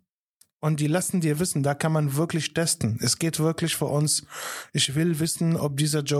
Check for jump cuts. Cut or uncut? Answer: uncut